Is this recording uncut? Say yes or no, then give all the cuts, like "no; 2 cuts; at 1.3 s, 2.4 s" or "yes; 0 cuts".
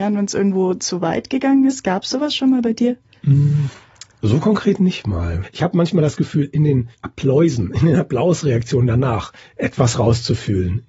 yes; 0 cuts